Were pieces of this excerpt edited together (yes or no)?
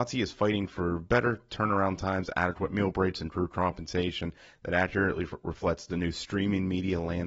no